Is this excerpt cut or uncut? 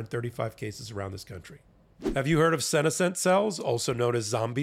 uncut